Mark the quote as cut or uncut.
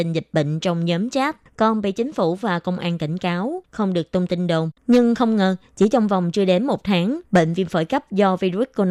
cut